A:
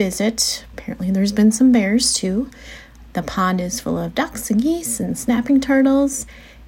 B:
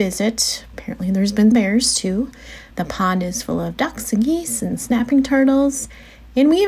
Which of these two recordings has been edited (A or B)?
B